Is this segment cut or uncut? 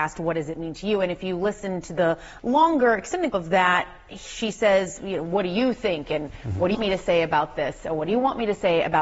cut